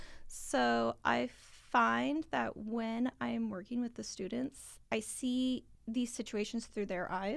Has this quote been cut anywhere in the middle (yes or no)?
yes